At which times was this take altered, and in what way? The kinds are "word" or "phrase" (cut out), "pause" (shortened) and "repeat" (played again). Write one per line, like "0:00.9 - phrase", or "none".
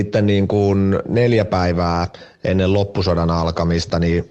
none